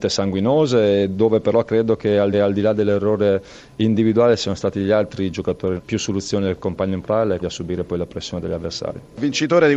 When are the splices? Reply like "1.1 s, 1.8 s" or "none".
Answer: 2.3 s, 5.8 s, 7.0 s, 7.4 s